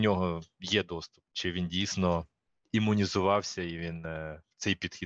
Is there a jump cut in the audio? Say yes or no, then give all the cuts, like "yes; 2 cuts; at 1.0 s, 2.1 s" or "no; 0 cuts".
yes; 1 cut; at 1.3 s